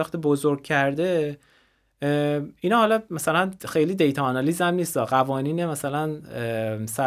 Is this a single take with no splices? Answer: no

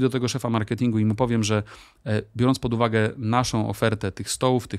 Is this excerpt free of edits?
yes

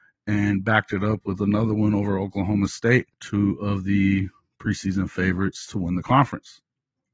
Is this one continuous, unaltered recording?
no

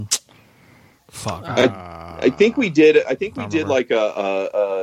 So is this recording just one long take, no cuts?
yes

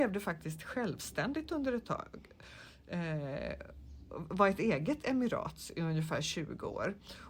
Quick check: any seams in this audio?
no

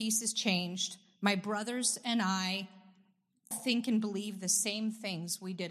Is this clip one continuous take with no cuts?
no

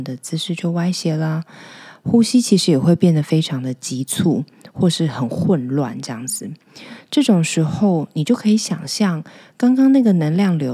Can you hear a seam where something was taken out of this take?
no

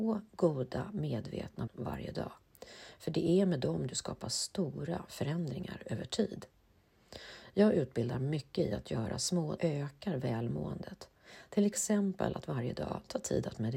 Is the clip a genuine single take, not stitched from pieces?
no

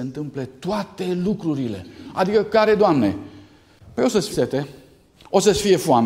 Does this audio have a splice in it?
yes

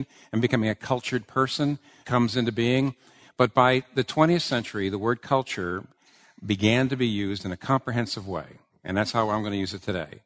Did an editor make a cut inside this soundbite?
no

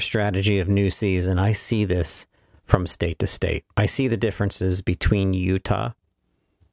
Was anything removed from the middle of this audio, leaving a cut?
no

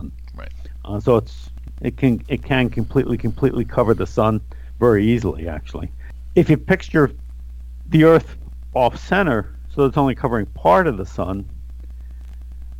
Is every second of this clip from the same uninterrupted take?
no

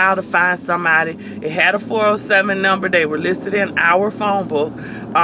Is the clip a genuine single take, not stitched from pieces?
yes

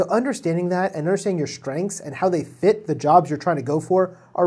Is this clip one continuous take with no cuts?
yes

